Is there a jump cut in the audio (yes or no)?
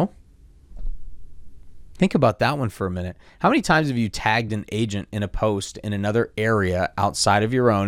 no